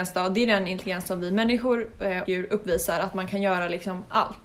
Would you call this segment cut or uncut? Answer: cut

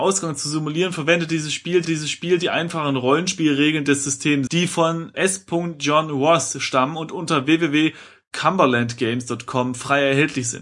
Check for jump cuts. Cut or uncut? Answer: cut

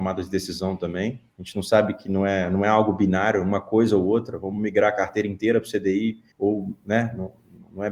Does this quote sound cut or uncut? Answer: cut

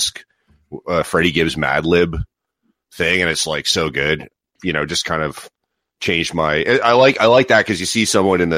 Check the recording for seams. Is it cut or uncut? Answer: uncut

